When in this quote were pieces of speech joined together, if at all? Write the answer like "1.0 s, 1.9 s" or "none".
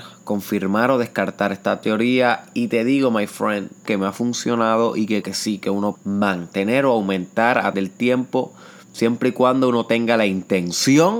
3.9 s, 5.2 s, 5.9 s, 7.7 s

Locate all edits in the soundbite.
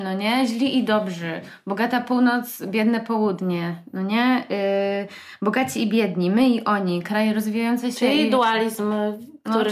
none

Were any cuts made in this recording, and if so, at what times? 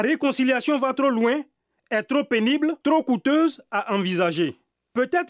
2.8 s

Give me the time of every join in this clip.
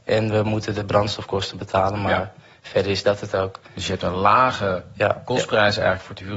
none

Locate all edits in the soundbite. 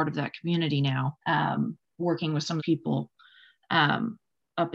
1.2 s, 2.6 s

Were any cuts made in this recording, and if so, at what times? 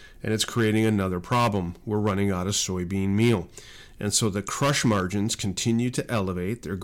none

